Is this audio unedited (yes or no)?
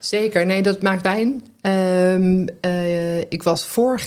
no